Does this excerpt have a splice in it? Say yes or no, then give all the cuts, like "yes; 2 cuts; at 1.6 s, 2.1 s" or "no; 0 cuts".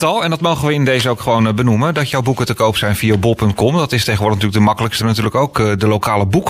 yes; 1 cut; at 5.0 s